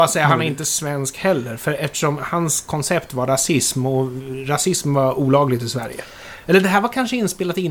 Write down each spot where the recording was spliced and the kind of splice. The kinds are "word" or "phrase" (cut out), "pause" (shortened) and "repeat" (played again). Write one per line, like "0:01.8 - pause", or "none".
none